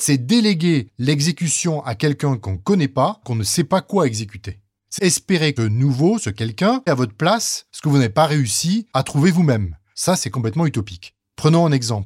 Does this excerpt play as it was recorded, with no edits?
no; 4 cuts; at 3.2 s, 5.0 s, 5.6 s, 6.9 s

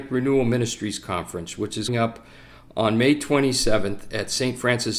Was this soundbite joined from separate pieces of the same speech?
yes; 1 cut; at 1.9 s

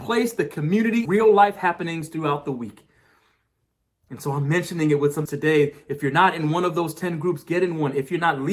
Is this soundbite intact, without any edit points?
no; 2 cuts; at 1.1 s, 5.3 s

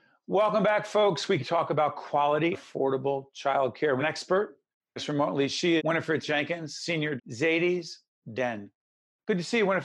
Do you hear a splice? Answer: yes; 8 cuts; at 1.4 s, 2.5 s, 4.0 s, 5.0 s, 5.8 s, 6.2 s, 7.2 s, 8.2 s

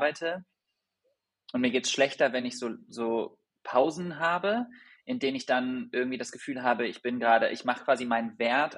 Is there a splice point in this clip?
no; 0 cuts

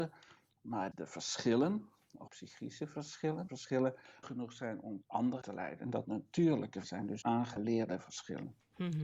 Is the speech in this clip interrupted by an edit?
yes; 9 cuts; at 0.9 s, 2.3 s, 3.5 s, 4.2 s, 5.0 s, 5.4 s, 6.0 s, 6.8 s, 7.2 s

